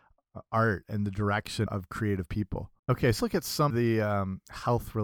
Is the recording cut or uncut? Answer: cut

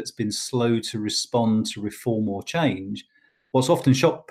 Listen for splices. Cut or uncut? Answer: uncut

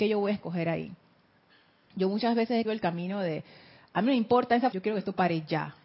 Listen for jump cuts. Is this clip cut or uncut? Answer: cut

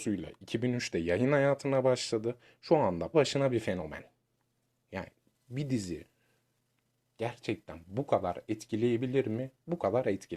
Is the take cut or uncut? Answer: cut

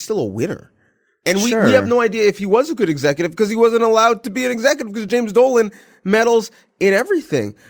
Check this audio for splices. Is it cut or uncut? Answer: uncut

